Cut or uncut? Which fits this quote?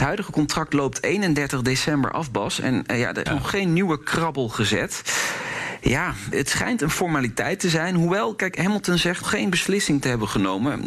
cut